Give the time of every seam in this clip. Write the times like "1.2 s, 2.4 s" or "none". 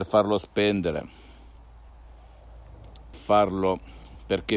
3.1 s